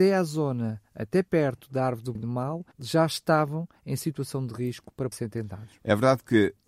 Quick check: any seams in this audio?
yes; 3 cuts; at 2.2 s, 2.7 s, 5.1 s

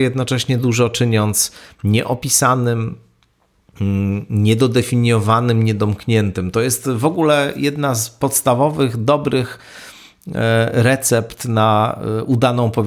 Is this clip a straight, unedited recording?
yes; 0 cuts

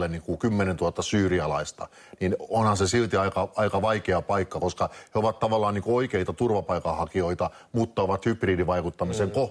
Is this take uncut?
yes; 0 cuts

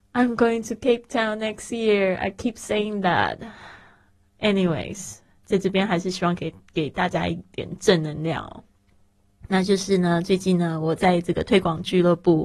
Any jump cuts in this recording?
no; 0 cuts

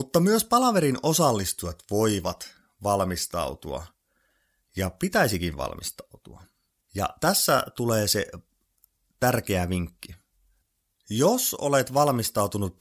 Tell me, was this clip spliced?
no; 0 cuts

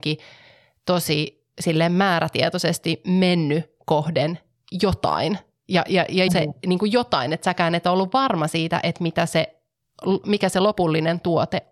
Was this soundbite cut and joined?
yes; 1 cut; at 6.3 s

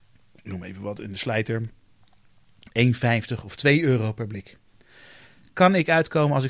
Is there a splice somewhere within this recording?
no; 0 cuts

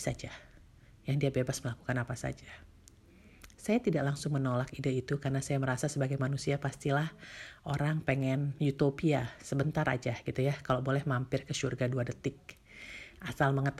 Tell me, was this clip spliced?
no; 0 cuts

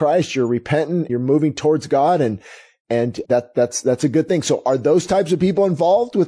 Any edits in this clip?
yes; 2 cuts; at 1.1 s, 3.2 s

